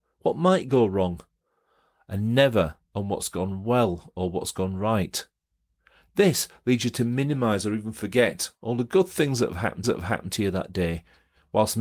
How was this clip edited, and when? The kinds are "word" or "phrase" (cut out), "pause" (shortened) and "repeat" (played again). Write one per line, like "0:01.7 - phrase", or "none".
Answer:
0:02.8 - pause
0:09.8 - repeat